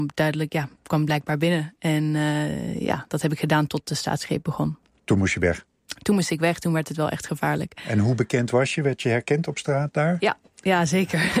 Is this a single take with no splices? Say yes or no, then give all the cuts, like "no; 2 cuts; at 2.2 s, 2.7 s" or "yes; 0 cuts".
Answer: yes; 0 cuts